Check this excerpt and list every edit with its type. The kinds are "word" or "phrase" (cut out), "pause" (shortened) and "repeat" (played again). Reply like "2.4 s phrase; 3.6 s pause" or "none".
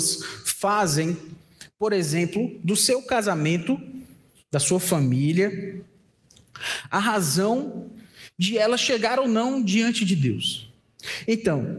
4.3 s pause